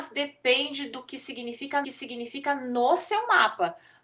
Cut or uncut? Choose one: cut